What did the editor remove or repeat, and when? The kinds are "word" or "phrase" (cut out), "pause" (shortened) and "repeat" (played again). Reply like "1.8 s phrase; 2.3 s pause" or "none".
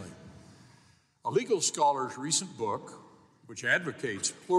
none